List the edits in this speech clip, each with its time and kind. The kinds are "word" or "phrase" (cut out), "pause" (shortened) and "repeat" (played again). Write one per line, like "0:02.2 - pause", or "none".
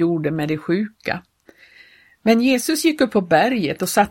none